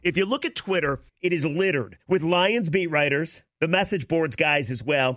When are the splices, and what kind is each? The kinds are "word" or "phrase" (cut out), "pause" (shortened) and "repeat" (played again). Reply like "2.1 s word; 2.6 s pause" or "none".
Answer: 1.1 s pause; 2.0 s pause